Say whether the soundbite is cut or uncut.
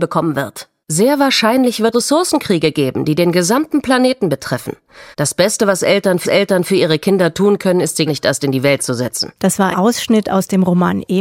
cut